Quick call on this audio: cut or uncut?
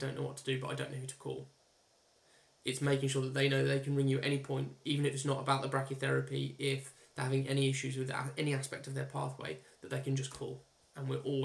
uncut